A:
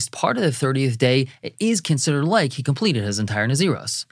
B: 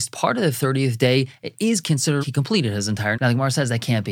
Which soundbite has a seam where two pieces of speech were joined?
B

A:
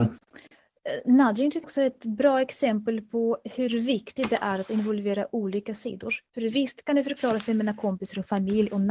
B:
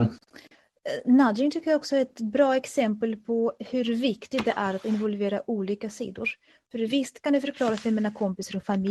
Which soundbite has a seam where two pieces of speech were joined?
A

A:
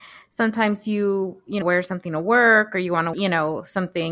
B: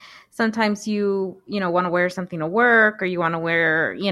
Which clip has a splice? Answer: A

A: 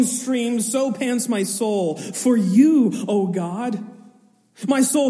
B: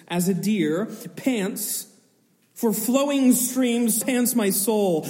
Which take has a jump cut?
B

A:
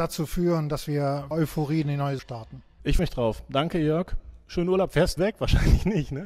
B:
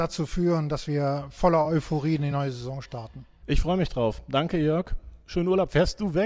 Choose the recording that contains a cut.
A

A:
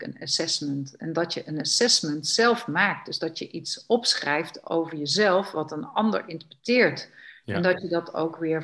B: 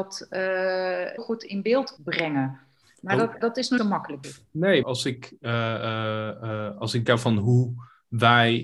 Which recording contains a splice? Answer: B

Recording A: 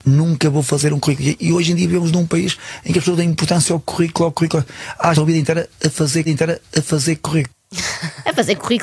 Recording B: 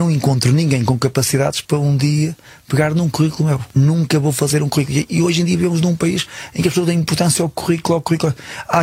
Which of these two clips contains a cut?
A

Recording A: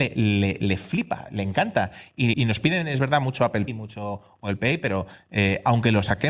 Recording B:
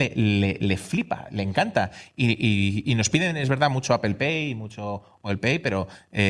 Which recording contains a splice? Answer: A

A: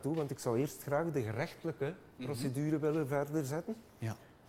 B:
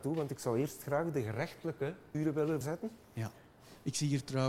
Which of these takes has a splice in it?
B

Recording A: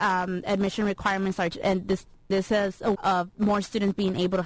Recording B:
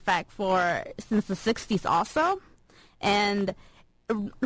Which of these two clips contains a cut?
A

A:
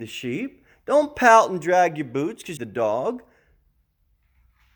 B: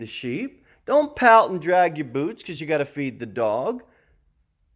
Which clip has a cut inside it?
A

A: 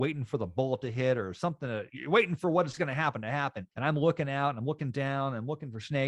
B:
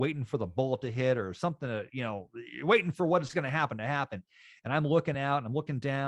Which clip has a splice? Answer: A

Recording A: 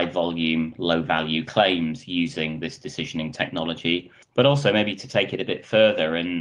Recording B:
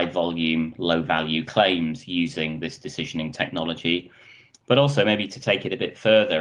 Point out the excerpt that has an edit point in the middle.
A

